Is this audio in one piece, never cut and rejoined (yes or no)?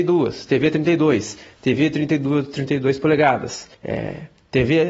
no